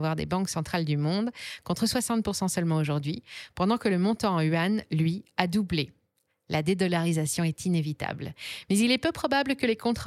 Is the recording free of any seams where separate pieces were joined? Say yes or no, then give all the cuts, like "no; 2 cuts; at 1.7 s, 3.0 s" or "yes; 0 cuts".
yes; 0 cuts